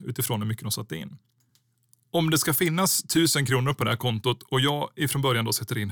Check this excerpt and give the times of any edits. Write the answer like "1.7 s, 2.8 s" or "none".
none

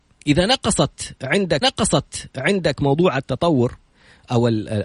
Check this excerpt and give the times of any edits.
1.6 s

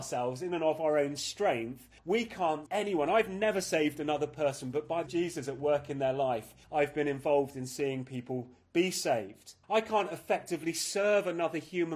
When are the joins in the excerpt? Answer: 2.0 s, 2.7 s, 5.1 s, 6.6 s, 9.6 s

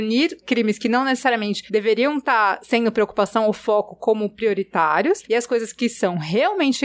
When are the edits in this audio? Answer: none

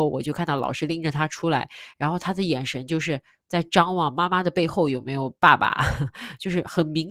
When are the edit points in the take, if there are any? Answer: 5.4 s

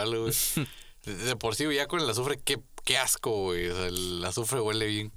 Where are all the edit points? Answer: none

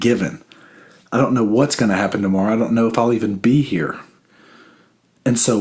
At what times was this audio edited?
none

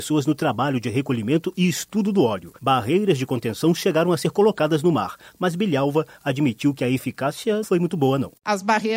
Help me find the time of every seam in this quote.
2.6 s, 7.6 s

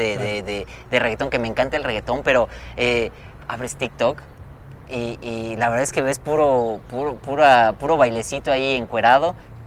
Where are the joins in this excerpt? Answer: none

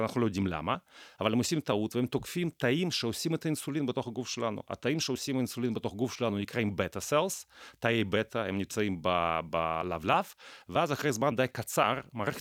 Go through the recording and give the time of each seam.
none

